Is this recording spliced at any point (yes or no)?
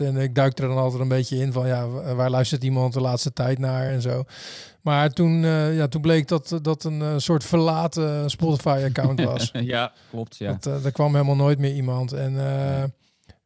no